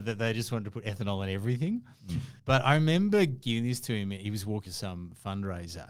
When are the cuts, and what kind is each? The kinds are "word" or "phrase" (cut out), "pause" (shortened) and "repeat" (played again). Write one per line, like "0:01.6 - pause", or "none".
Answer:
0:02.4 - pause
0:04.7 - word